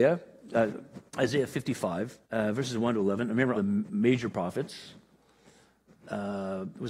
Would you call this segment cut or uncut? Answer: cut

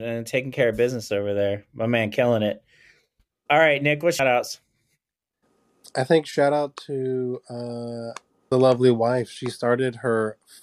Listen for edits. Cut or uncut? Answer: cut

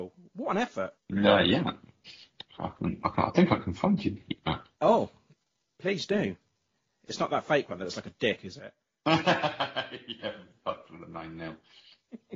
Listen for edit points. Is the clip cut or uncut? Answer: uncut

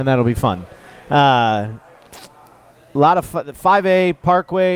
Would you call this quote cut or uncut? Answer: uncut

